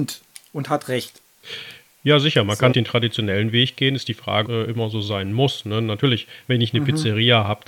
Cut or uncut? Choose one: cut